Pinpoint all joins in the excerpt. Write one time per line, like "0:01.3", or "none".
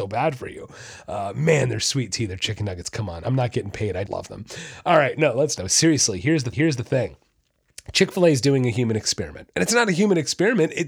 0:04.1
0:05.6
0:06.5